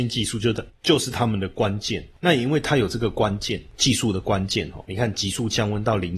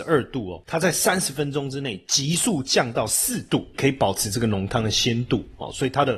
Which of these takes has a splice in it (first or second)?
second